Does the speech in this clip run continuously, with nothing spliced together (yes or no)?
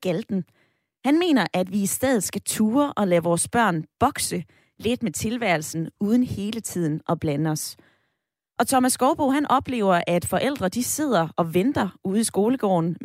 yes